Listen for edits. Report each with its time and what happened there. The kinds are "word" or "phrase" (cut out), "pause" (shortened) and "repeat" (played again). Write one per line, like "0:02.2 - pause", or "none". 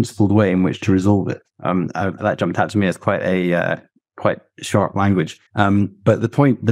0:01.5 - pause
0:02.2 - word
0:05.5 - pause